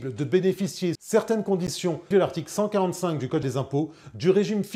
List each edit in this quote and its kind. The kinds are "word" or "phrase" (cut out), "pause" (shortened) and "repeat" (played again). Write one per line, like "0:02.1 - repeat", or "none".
0:00.9 - word
0:02.1 - word
0:03.4 - word